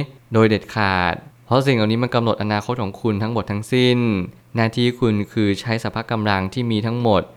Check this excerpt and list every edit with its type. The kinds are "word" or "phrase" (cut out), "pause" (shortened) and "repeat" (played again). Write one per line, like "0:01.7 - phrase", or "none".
none